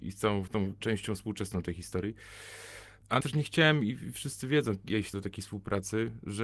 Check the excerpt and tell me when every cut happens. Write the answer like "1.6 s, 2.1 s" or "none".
3.2 s, 5.1 s

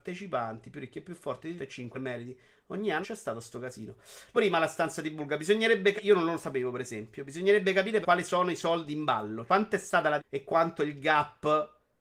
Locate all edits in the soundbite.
1.6 s, 1.9 s, 3.0 s, 4.3 s, 6.0 s, 8.0 s, 9.5 s, 10.2 s

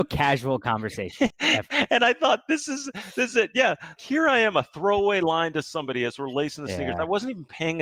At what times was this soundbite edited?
1.3 s, 4.0 s

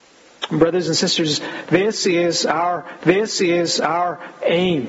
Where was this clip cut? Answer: 3.0 s

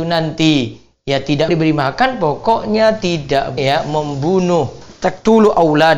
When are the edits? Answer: 1.5 s, 3.6 s

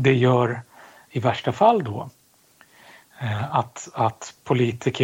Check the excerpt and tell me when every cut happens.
none

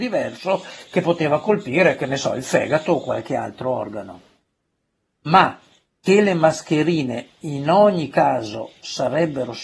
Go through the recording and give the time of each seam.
none

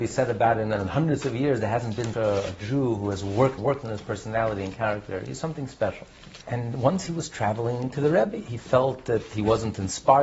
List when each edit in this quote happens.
2.1 s, 3.6 s, 6.4 s

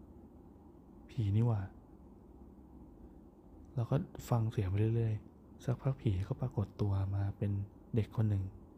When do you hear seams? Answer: 5.6 s

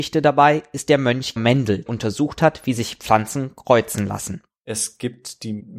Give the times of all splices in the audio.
1.4 s, 1.9 s, 4.5 s

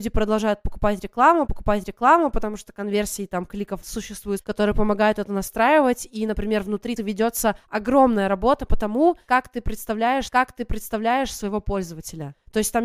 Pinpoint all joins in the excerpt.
1.5 s, 3.8 s, 4.4 s, 7.0 s, 10.3 s

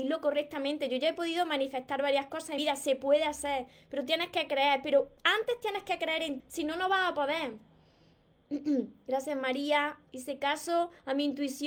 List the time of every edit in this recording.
2.6 s, 5.2 s, 6.4 s

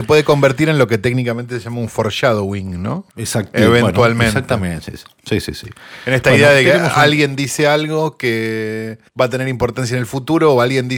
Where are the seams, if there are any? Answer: 3.1 s, 9.1 s

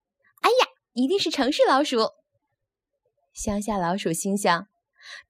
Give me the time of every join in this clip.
none

